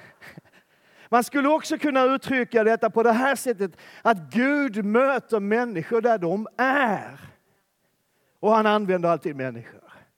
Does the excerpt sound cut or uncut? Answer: uncut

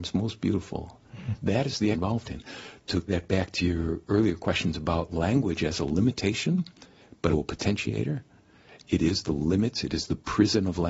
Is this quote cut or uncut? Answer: cut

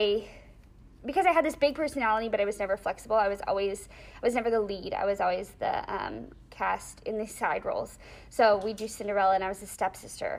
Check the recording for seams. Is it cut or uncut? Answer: uncut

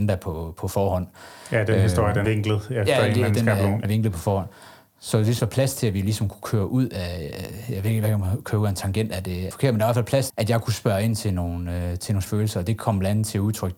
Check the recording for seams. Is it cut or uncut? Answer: cut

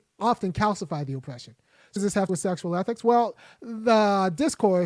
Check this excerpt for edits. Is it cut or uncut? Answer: cut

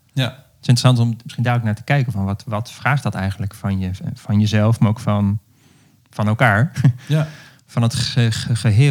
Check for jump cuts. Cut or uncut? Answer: uncut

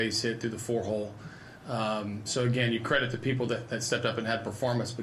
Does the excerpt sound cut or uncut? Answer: uncut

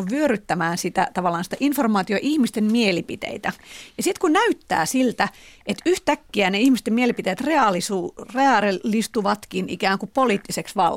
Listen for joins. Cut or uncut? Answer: uncut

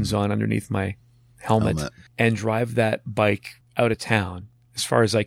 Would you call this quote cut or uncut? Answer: uncut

